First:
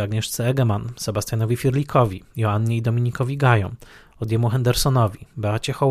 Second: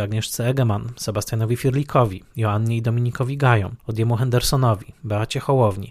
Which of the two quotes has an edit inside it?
second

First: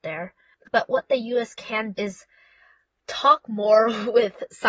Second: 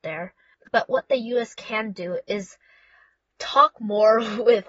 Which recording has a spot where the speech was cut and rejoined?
first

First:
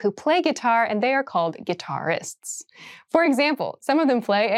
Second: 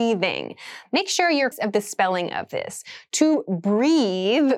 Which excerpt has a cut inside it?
second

